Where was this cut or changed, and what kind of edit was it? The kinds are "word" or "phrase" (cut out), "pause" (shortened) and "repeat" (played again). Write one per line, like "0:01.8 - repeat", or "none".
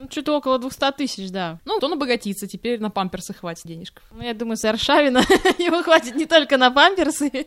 0:01.8 - word
0:03.7 - word
0:04.6 - word